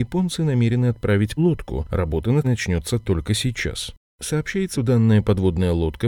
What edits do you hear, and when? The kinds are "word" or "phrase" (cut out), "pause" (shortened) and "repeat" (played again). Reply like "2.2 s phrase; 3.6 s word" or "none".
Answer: 1.4 s word; 2.4 s word; 4.7 s word